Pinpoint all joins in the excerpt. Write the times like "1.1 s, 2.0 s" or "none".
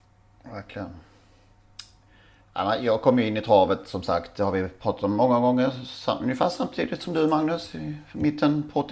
none